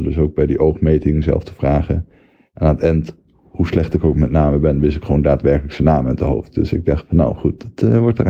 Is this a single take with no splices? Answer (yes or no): yes